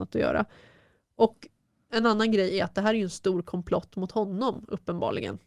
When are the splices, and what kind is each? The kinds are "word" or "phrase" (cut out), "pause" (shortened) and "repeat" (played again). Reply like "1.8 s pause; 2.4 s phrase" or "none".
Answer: none